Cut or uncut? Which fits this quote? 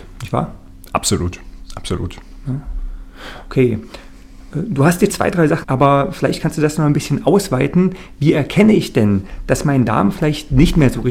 cut